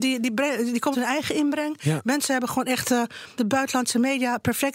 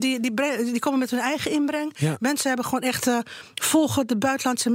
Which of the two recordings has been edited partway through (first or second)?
first